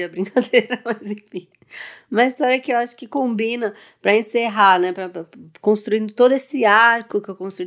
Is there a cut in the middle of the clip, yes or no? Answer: no